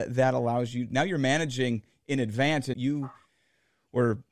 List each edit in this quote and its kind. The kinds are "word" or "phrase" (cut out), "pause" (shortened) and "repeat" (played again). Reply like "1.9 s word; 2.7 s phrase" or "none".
2.7 s word